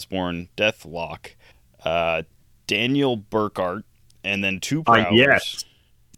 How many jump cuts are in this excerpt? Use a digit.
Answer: 2